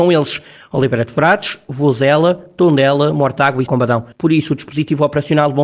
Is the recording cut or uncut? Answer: cut